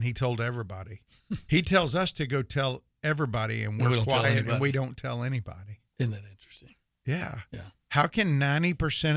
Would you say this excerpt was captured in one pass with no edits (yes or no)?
no